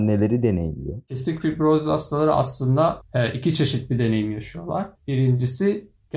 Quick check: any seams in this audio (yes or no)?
no